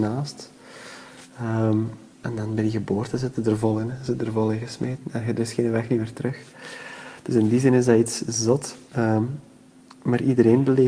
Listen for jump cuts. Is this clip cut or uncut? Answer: cut